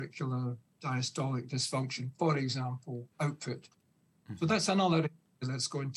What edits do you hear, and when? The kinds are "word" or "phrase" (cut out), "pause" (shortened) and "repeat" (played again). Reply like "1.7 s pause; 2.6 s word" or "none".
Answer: 3.1 s pause